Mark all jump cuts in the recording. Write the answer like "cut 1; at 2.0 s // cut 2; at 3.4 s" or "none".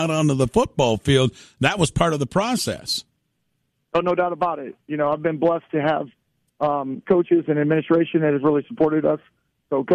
none